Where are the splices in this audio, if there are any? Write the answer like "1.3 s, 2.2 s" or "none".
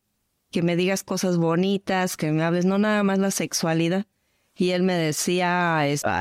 none